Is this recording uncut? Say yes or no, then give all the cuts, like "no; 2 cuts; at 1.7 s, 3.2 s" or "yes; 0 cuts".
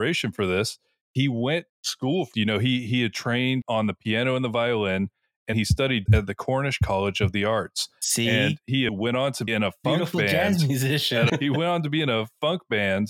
no; 8 cuts; at 1.7 s, 2.3 s, 3.6 s, 5.5 s, 6.1 s, 8.9 s, 9.5 s, 11.3 s